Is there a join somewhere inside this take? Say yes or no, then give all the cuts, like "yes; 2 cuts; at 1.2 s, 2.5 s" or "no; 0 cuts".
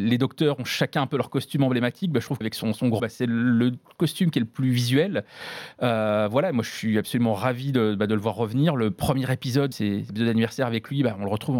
yes; 3 cuts; at 2.4 s, 3.0 s, 9.7 s